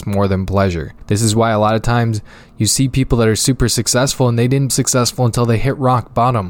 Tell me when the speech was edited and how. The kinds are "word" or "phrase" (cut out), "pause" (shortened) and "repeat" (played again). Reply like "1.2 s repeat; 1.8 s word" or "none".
4.7 s word